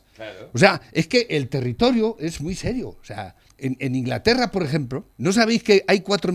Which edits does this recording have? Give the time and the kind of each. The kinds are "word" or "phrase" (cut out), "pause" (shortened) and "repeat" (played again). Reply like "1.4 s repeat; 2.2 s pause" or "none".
3.5 s pause; 5.1 s pause